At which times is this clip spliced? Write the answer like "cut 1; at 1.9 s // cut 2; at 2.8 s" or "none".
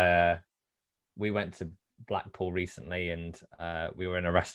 none